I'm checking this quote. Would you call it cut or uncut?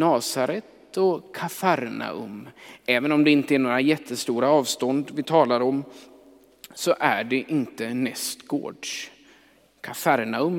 uncut